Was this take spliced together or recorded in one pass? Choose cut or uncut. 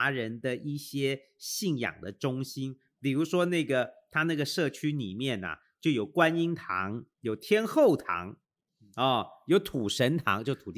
uncut